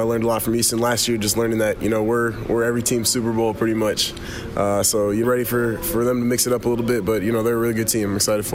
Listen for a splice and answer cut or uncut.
cut